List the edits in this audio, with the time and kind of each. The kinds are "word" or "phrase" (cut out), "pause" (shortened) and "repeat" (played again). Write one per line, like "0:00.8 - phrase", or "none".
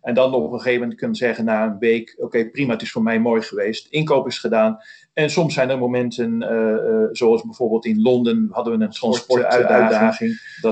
none